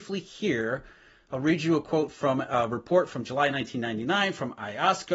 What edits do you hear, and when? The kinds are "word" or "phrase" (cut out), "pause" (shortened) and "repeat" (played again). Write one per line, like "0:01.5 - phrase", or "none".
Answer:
none